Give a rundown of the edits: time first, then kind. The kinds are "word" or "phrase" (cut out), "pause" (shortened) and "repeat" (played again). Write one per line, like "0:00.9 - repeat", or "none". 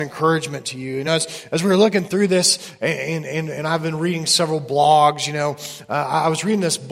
none